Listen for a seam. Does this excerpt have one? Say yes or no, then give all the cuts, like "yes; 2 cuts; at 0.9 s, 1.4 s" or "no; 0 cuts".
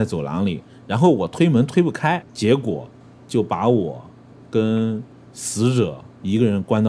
yes; 1 cut; at 2.3 s